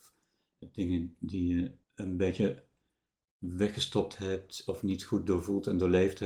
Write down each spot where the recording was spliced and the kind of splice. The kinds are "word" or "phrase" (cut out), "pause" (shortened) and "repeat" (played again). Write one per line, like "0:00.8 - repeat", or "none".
0:01.8 - pause